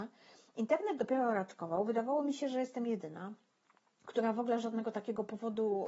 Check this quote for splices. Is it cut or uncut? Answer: uncut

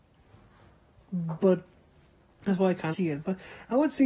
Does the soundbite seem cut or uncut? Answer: cut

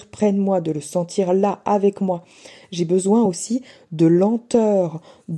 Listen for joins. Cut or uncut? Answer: uncut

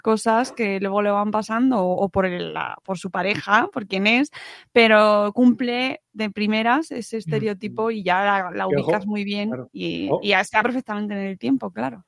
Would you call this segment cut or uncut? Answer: cut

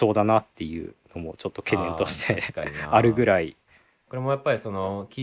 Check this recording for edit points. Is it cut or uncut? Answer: uncut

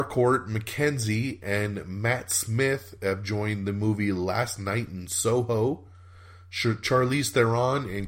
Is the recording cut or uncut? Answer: uncut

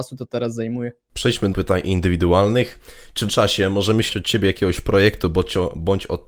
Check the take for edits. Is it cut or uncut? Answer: cut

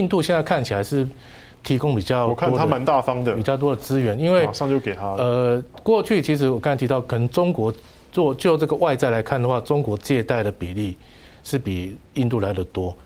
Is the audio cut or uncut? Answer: uncut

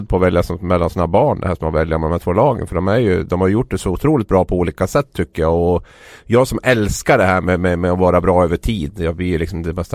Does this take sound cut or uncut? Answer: uncut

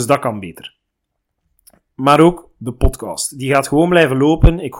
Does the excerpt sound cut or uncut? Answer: uncut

